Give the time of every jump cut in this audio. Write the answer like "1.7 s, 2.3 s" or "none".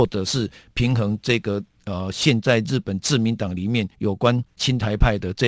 3.9 s, 4.5 s

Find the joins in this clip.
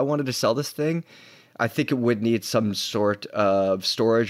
none

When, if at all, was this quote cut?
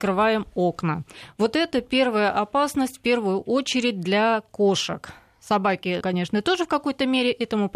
6.0 s

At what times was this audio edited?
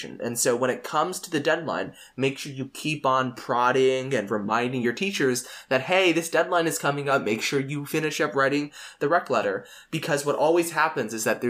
none

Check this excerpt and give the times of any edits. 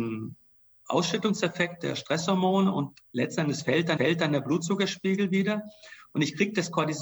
3.0 s, 4.0 s

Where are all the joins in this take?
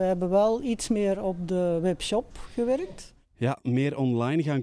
none

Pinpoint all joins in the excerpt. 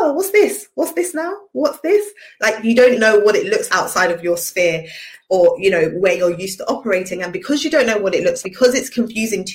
3.0 s, 3.7 s, 8.4 s

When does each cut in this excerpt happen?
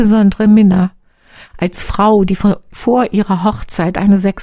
none

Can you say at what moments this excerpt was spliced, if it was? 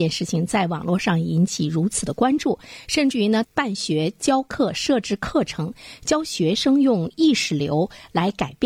3.5 s

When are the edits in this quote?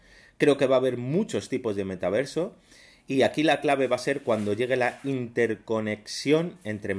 none

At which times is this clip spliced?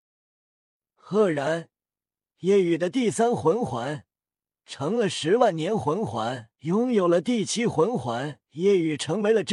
6.5 s, 8.4 s

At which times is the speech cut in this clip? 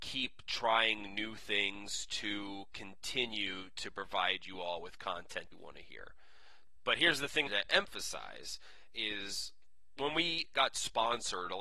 5.5 s, 7.5 s

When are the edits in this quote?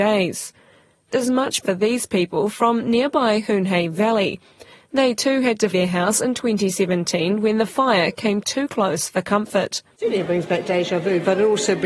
1.1 s, 1.6 s, 5.7 s

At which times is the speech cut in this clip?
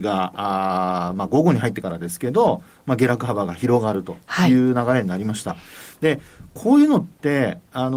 none

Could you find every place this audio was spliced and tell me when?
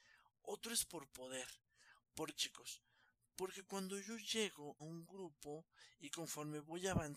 2.3 s, 4.8 s

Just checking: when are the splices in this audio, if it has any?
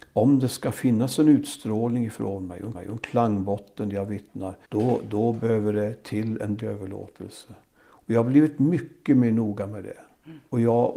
2.7 s, 4.6 s, 6.6 s

